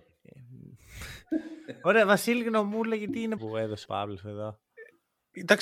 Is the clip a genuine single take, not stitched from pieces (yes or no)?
no